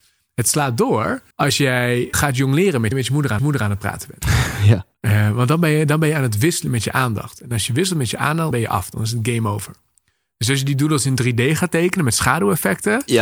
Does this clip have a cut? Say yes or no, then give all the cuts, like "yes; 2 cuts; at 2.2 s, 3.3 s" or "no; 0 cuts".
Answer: yes; 6 cuts; at 1.3 s, 2.1 s, 2.9 s, 3.4 s, 4.9 s, 8.5 s